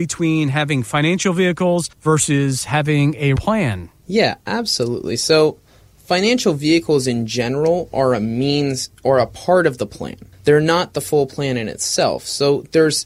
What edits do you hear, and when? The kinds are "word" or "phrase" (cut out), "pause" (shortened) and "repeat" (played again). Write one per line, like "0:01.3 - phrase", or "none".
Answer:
0:01.9 - pause
0:03.4 - word
0:10.3 - pause